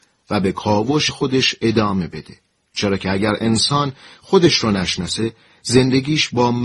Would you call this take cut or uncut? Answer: cut